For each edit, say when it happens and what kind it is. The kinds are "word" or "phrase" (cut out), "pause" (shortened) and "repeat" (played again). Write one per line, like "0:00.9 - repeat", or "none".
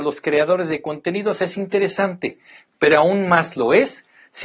none